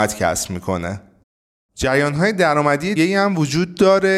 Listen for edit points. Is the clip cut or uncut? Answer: cut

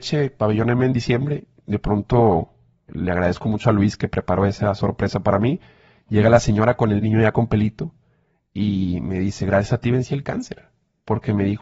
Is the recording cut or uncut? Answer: cut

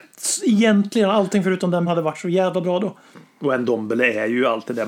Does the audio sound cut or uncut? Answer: cut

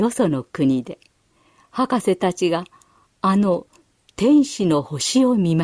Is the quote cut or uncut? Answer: uncut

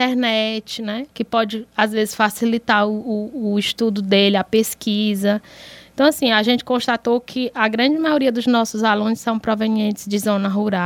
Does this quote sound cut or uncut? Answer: cut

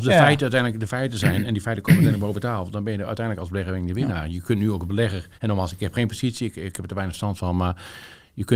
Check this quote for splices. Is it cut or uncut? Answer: cut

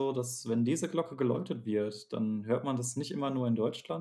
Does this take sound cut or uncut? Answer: uncut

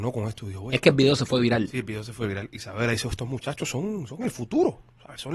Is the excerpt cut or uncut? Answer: uncut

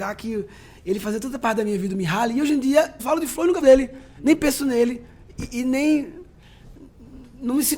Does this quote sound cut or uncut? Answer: cut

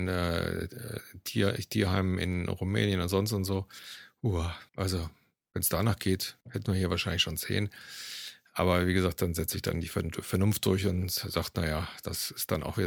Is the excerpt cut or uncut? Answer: cut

